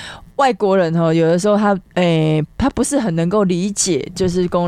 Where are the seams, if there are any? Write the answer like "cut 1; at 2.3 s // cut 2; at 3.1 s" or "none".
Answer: cut 1; at 1.9 s